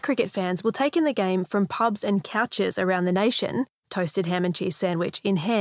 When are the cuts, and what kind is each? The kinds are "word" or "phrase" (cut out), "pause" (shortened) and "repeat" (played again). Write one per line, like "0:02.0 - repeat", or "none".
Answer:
none